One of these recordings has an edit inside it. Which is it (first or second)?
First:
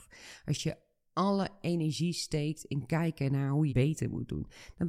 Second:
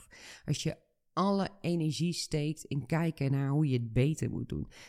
first